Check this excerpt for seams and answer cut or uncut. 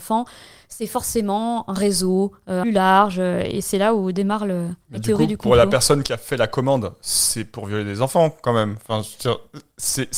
cut